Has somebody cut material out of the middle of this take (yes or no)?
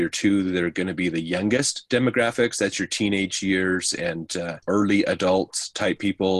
yes